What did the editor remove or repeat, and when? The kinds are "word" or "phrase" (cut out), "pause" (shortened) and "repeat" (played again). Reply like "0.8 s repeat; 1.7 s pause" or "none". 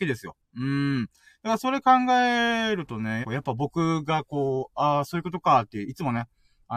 3.2 s phrase